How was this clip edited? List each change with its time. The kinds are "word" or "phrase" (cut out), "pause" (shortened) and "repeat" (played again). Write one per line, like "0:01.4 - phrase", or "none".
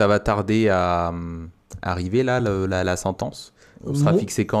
none

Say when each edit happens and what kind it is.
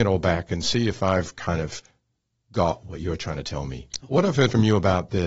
none

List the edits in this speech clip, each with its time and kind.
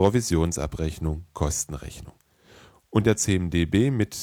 0:03.0 - phrase

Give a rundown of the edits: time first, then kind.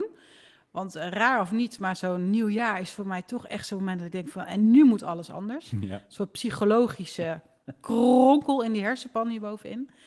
none

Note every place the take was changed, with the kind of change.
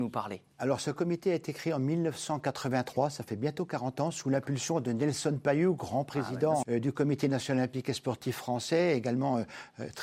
0:06.6 - word

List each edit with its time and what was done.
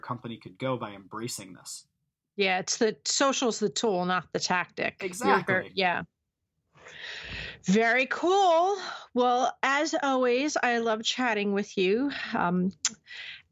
none

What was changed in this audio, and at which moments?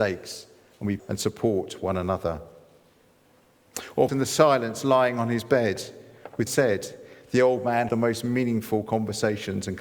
0:01.0 - word
0:04.1 - word
0:06.5 - word
0:07.9 - word

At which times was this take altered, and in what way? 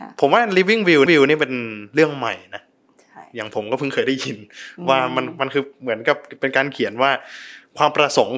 0:01.1 - repeat

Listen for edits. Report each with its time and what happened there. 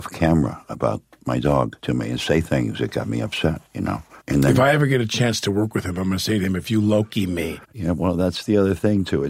0:01.8 - pause
0:03.7 - pause
0:04.2 - pause
0:07.6 - pause

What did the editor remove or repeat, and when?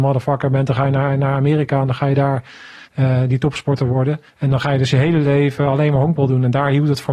0:02.8 - pause
0:04.3 - pause

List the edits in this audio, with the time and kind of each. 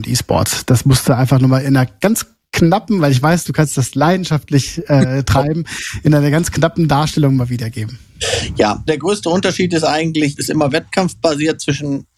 0:08.9 - word
0:10.4 - word

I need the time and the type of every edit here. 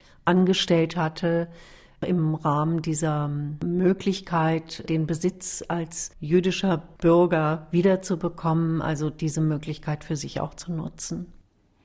none

